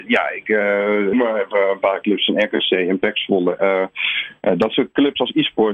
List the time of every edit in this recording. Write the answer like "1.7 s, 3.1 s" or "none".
1.1 s